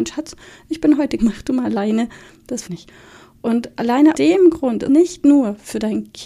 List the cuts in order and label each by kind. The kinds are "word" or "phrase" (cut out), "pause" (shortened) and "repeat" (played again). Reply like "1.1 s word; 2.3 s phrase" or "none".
1.2 s word; 2.6 s word; 4.1 s word; 4.9 s word